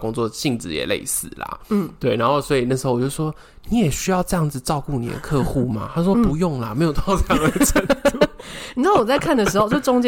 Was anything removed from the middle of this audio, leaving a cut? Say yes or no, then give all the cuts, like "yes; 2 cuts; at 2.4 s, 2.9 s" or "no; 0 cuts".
no; 0 cuts